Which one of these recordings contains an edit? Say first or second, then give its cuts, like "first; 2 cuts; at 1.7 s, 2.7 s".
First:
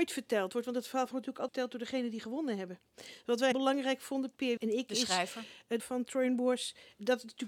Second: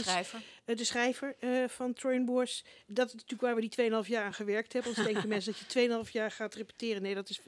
first; 5 cuts; at 1.1 s, 1.5 s, 3.5 s, 4.6 s, 5.8 s